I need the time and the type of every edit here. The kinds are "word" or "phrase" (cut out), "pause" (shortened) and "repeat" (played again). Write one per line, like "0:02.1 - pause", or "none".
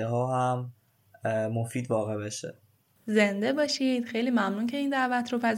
none